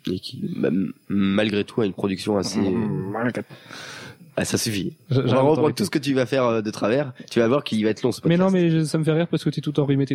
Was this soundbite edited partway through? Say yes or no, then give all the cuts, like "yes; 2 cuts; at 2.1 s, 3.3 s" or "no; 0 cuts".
no; 0 cuts